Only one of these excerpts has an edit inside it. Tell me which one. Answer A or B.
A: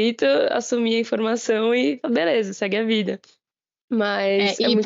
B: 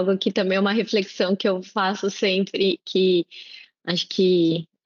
B